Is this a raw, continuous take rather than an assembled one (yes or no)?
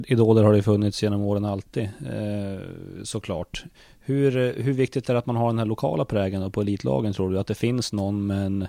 yes